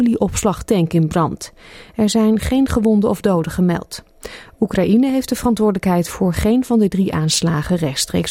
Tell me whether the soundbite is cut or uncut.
uncut